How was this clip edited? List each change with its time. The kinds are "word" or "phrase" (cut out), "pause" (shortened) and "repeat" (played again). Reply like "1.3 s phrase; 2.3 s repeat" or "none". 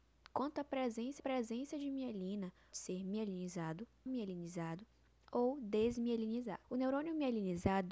1.2 s repeat; 2.7 s phrase; 4.1 s word; 6.6 s pause